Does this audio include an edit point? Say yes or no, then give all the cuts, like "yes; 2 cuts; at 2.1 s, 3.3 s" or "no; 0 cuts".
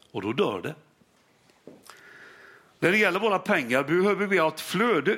no; 0 cuts